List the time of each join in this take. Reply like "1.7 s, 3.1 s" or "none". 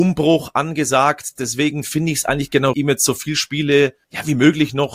2.7 s, 4.0 s

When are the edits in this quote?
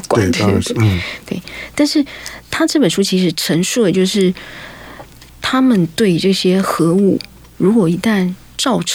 none

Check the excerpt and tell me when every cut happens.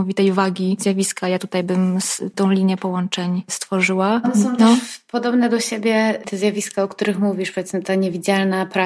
2.3 s

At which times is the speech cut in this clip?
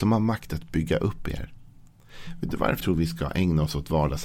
2.8 s

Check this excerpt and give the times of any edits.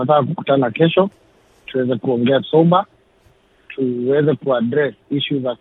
2.4 s

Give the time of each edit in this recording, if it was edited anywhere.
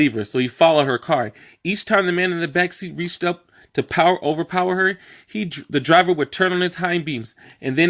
none

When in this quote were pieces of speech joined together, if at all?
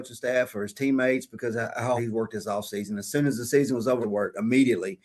2.0 s, 4.0 s

